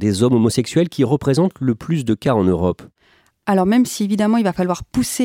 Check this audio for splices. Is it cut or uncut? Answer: uncut